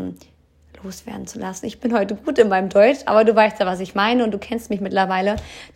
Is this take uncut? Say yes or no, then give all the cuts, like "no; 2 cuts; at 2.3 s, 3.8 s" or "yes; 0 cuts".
yes; 0 cuts